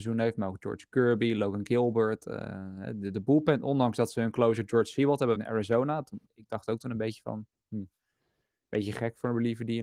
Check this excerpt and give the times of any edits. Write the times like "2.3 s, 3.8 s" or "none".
5.3 s, 6.2 s